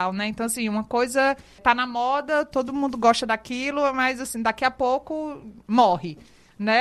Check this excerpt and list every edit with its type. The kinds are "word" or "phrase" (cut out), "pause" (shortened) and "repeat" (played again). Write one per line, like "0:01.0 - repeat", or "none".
none